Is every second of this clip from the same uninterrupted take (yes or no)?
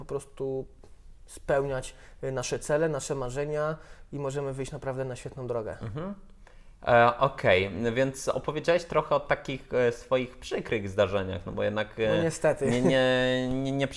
yes